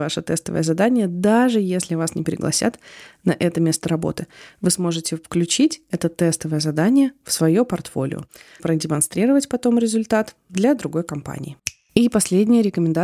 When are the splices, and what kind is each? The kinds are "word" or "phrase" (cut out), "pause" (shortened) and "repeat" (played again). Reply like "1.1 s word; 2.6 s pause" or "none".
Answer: 8.6 s word